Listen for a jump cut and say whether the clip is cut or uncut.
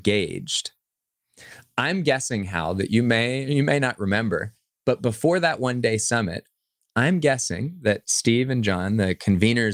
uncut